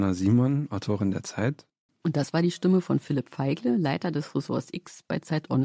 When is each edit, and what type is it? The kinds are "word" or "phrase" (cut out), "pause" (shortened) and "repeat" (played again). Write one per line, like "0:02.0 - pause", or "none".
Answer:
none